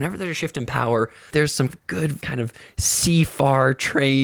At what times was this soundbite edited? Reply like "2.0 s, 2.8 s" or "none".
1.3 s, 1.7 s, 2.2 s